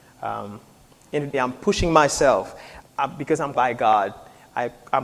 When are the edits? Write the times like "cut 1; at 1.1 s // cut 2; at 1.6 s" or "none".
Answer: cut 1; at 1.3 s // cut 2; at 2.8 s // cut 3; at 3.5 s